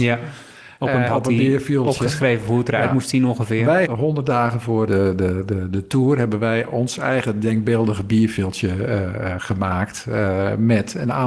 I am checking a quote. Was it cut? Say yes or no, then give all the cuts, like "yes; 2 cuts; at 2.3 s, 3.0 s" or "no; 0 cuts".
yes; 3 cuts; at 1.1 s, 3.9 s, 4.9 s